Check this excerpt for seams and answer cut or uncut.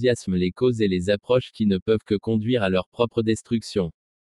uncut